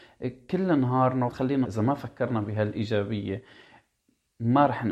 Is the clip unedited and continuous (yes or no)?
no